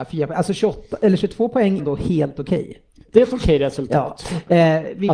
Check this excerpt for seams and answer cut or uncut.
cut